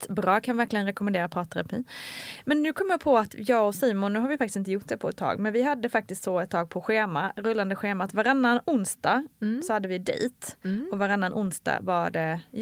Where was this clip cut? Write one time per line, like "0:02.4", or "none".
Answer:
none